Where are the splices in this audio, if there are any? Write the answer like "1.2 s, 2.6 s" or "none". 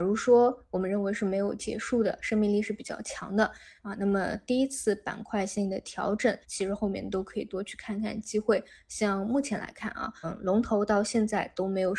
6.4 s, 10.2 s